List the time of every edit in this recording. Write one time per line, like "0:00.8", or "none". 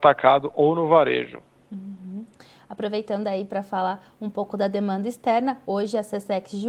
none